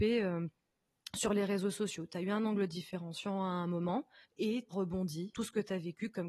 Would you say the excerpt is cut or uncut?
cut